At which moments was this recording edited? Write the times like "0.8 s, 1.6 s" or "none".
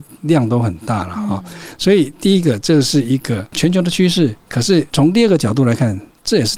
4.4 s